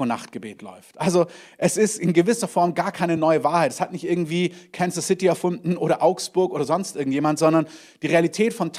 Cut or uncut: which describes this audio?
uncut